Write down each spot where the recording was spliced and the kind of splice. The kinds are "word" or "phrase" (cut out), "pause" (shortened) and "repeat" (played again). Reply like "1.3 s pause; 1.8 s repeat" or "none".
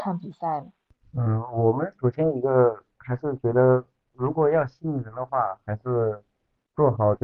none